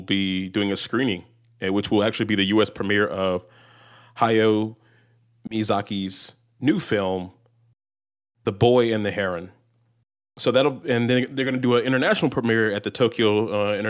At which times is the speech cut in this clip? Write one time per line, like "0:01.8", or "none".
none

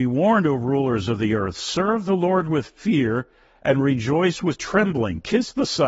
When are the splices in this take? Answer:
none

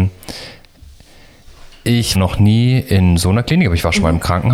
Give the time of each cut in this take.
0:02.1

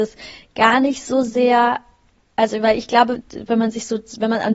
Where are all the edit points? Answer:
none

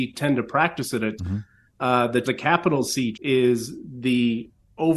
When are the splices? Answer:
0:01.2
0:02.2
0:03.1

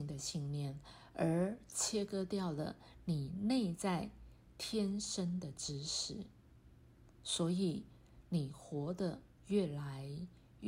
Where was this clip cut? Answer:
0:09.3

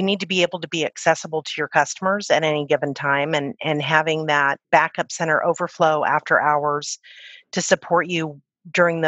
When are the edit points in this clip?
0:04.6

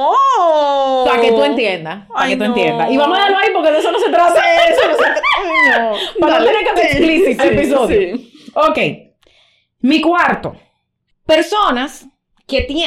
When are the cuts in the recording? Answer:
0:06.8
0:07.4

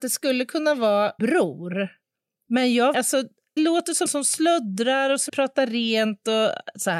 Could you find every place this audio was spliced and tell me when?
0:01.2
0:02.9
0:03.6
0:04.1
0:05.3

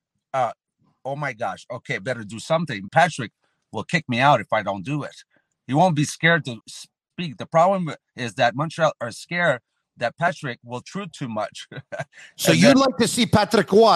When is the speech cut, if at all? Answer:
0:02.0
0:02.9
0:06.6
0:10.8

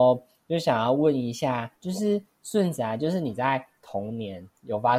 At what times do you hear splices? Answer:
0:01.7

